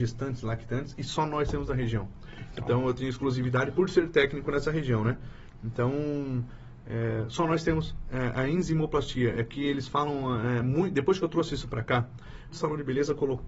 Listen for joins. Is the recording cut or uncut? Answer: cut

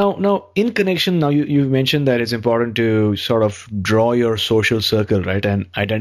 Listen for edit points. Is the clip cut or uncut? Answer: uncut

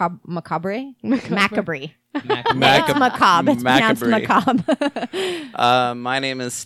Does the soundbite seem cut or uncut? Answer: cut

